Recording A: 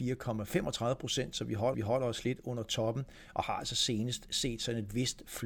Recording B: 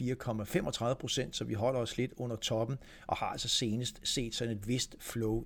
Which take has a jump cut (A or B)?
A